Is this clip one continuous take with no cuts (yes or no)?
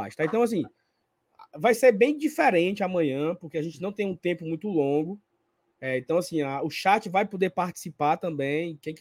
yes